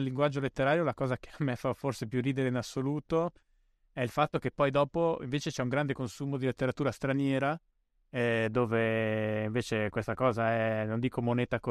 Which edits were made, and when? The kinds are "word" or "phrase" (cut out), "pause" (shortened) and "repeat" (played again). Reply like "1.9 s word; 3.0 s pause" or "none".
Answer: none